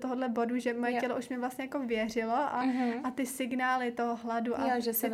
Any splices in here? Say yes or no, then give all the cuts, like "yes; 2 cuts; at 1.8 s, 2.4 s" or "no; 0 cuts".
no; 0 cuts